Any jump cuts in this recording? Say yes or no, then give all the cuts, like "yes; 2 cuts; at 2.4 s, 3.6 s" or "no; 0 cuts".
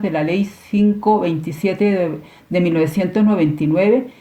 no; 0 cuts